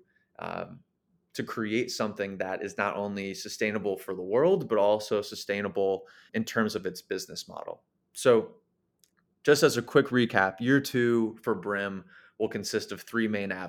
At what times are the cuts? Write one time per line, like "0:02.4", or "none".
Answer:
0:06.3